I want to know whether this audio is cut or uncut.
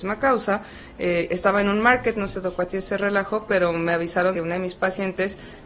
cut